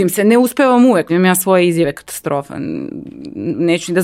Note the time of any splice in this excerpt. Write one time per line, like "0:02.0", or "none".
0:01.1